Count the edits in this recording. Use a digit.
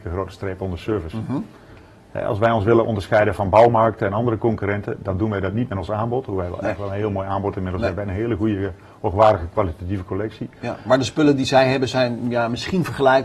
0